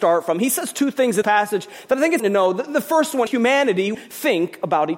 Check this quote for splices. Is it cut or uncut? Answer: cut